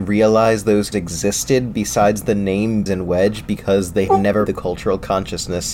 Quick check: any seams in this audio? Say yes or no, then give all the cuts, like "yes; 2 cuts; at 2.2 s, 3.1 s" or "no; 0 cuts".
yes; 4 cuts; at 0.9 s, 2.9 s, 4.1 s, 4.5 s